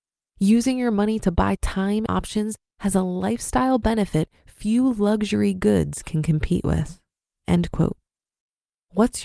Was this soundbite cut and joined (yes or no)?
yes